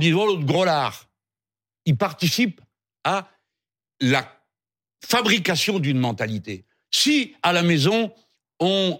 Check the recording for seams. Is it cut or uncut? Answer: uncut